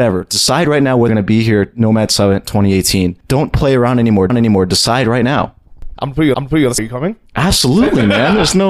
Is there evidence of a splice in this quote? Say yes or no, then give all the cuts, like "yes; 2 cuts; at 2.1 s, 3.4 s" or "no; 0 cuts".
yes; 6 cuts; at 1.1 s, 3.2 s, 4.3 s, 6.3 s, 6.8 s, 7.3 s